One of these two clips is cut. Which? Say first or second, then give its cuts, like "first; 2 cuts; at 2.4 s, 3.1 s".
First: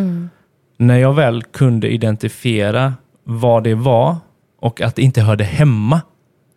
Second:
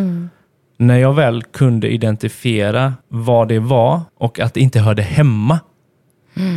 second; 2 cuts; at 3.0 s, 4.1 s